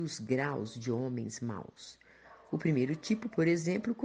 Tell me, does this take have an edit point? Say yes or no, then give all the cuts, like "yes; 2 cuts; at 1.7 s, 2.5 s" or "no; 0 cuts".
no; 0 cuts